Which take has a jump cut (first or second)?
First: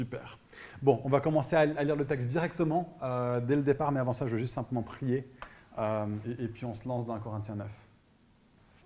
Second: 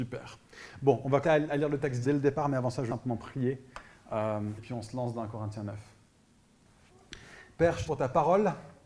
second